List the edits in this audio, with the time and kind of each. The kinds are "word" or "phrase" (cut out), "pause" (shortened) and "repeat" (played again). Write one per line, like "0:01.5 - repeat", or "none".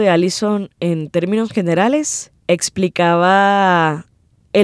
0:02.4 - pause